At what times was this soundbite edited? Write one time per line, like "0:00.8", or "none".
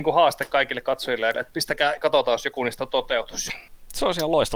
0:01.3
0:02.0

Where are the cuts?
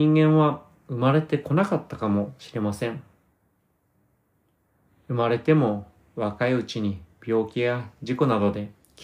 none

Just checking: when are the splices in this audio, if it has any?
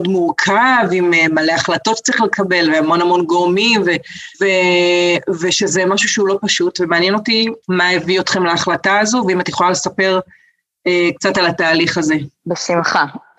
0:04.3
0:07.6
0:12.4

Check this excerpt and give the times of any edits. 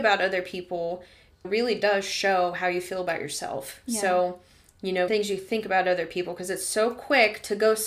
0:01.4
0:05.1

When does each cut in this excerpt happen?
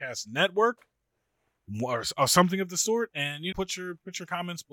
0:03.5

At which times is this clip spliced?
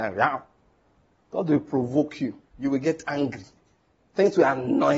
0:02.5
0:03.6

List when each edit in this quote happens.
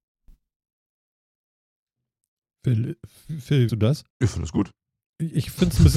0:03.2
0:03.7
0:04.1

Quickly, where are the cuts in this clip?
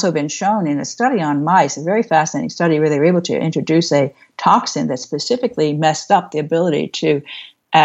none

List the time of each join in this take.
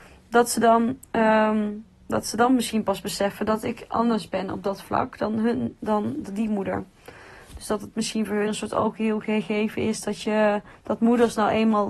0:08.5
0:10.8

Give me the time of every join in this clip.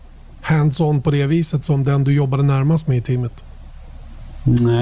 none

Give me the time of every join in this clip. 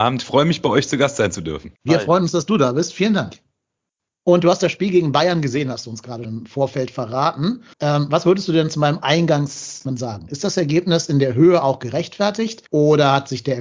0:01.8
0:04.0
0:06.2
0:07.7
0:12.7

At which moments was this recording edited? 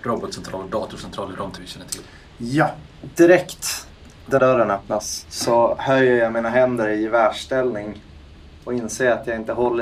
0:01.6
0:04.4

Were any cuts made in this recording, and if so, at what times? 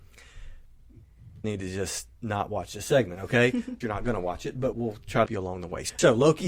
0:01.4
0:02.1
0:03.8
0:04.7
0:05.3

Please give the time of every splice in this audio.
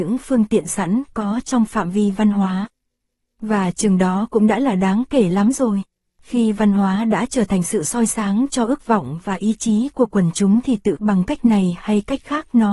0:11.0

